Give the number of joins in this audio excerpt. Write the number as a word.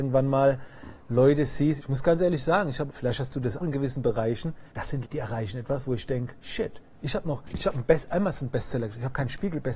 six